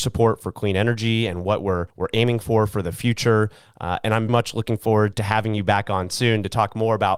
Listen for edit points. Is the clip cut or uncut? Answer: cut